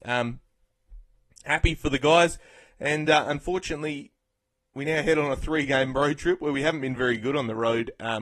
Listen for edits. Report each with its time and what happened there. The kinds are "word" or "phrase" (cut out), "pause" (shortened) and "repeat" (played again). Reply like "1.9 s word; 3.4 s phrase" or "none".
none